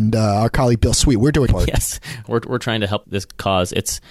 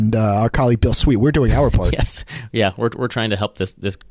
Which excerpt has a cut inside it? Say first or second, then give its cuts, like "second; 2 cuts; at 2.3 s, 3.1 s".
first; 3 cuts; at 1.5 s, 2.2 s, 3.0 s